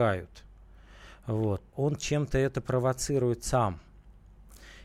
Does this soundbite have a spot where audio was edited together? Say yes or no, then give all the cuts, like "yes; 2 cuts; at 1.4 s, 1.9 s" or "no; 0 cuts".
yes; 1 cut; at 1.7 s